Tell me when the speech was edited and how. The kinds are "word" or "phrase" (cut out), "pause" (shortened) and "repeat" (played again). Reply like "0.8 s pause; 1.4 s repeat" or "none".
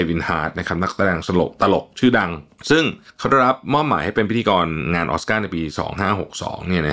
3.0 s pause